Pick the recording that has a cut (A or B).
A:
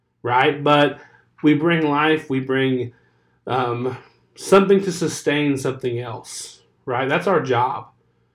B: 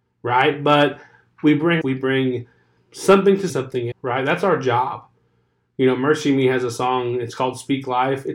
B